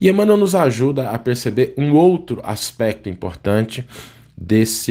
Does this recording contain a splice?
no; 0 cuts

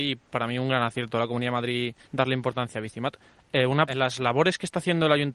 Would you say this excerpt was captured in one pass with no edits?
no; 2 cuts; at 2.0 s, 3.9 s

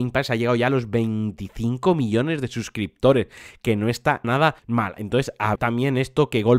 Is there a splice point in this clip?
yes; 3 cuts; at 4.2 s, 4.6 s, 5.6 s

